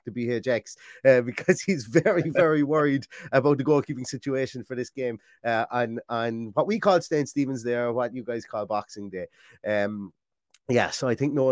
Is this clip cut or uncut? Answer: uncut